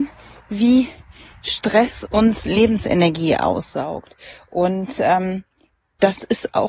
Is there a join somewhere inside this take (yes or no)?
no